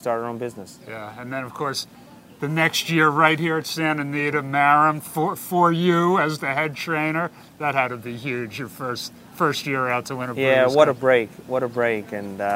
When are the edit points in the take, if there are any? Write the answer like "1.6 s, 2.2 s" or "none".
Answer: none